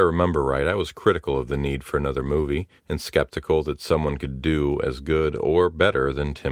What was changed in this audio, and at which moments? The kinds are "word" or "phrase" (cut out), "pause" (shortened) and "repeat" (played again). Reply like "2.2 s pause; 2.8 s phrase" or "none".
2.8 s pause